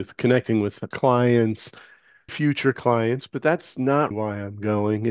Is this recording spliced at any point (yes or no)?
yes